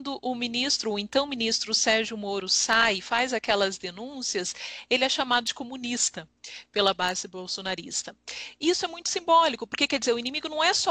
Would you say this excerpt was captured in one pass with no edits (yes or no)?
yes